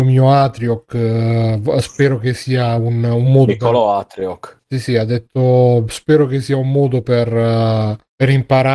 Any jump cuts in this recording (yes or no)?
no